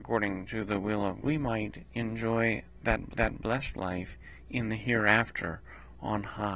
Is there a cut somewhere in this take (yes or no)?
yes